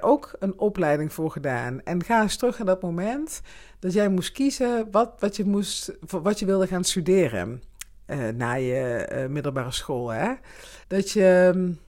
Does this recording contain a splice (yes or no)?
yes